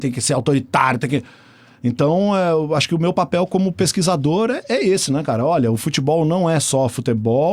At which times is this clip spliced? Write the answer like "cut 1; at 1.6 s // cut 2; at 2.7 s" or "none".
none